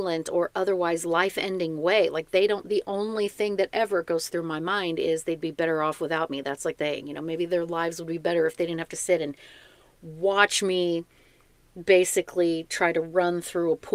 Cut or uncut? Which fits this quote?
cut